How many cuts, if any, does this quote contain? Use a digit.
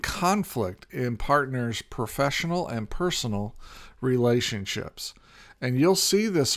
0